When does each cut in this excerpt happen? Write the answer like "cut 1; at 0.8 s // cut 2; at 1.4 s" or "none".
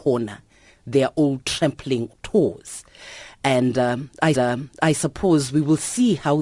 cut 1; at 2.1 s // cut 2; at 4.3 s